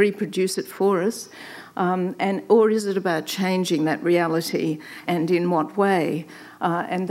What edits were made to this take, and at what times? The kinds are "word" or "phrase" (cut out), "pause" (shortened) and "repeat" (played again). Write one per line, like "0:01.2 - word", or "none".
0:05.0 - word